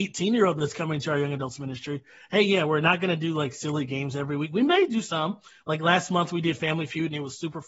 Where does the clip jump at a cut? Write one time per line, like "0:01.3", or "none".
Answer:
none